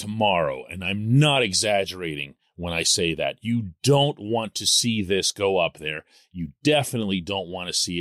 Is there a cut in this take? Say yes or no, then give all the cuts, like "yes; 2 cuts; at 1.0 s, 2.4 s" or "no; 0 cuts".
no; 0 cuts